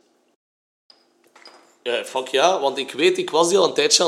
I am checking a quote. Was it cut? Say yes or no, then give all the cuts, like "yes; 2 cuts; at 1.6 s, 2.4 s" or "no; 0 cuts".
no; 0 cuts